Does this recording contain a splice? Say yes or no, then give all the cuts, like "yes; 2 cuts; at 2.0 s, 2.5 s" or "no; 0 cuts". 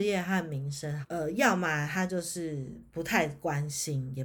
yes; 1 cut; at 1.0 s